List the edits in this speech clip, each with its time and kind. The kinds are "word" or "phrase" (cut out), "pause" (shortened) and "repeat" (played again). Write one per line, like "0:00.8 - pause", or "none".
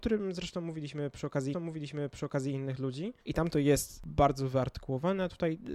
0:01.5 - repeat
0:03.2 - pause

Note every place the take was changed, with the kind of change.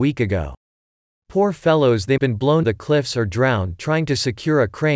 0:02.2 - word
0:02.6 - word

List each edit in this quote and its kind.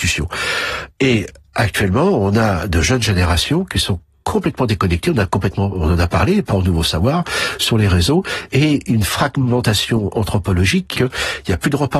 0:06.5 - word
0:10.9 - word

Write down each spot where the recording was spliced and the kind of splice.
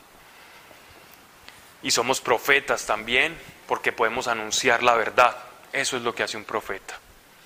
none

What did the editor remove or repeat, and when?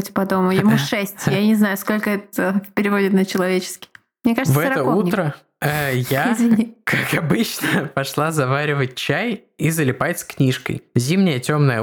none

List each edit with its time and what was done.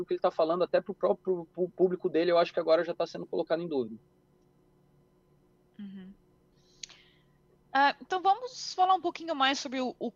none

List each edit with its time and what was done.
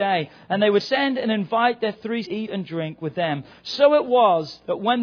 0:02.3 - phrase

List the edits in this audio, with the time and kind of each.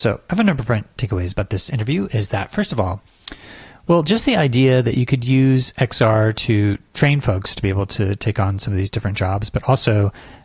none

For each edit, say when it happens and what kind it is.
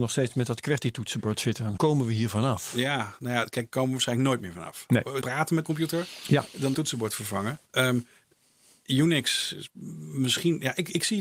0:01.8 - word
0:03.7 - word
0:05.2 - phrase
0:05.6 - word
0:06.7 - phrase
0:07.6 - pause

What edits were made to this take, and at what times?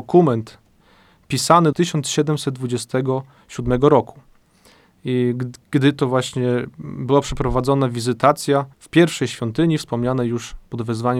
0:01.7 - phrase
0:08.7 - pause

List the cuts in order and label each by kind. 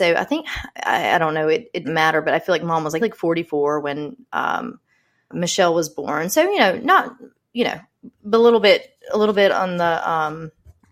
0:01.8 - word
0:03.0 - word
0:05.3 - word

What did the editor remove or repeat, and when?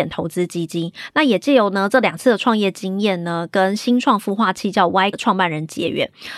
0:05.1 - word

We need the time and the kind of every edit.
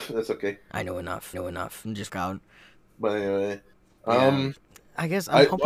0:01.3 - repeat
0:02.1 - word
0:04.6 - pause

